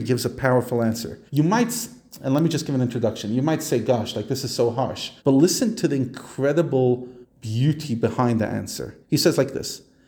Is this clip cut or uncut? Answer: cut